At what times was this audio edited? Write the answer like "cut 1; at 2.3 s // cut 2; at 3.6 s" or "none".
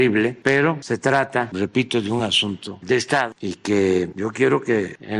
none

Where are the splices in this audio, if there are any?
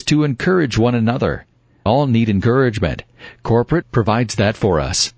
cut 1; at 1.9 s // cut 2; at 3.8 s

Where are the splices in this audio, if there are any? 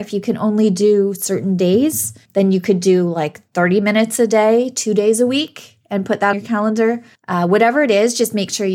cut 1; at 6.3 s

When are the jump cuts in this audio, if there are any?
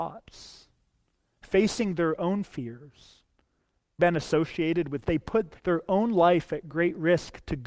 cut 1; at 4.0 s // cut 2; at 5.0 s // cut 3; at 5.6 s

